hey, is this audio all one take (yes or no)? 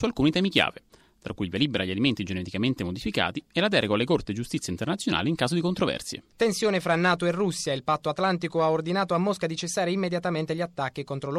no